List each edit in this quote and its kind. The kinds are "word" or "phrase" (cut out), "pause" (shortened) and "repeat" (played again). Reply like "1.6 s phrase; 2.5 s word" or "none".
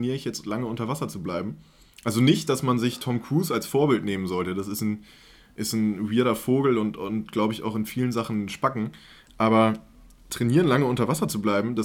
none